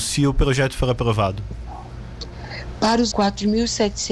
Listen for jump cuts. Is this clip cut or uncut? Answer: cut